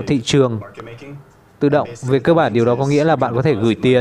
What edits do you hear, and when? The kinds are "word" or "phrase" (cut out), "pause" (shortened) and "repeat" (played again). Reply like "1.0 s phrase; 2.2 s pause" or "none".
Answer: none